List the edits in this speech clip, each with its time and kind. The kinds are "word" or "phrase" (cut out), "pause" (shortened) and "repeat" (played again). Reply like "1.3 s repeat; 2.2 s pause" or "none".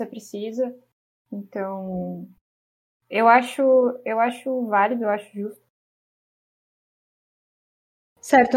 none